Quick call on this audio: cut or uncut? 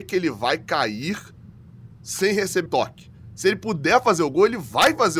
cut